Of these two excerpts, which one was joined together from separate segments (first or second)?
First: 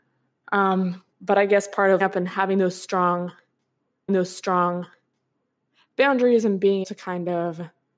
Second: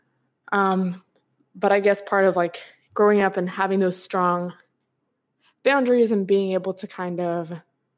first